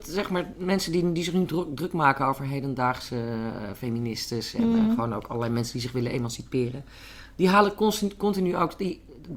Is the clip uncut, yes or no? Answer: yes